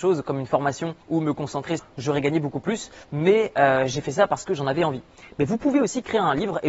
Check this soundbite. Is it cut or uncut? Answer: cut